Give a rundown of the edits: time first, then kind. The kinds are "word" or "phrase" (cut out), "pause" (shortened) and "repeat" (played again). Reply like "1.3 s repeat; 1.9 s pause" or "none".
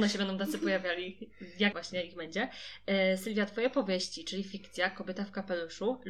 1.7 s word

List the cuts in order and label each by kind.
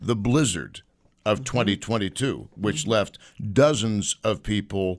none

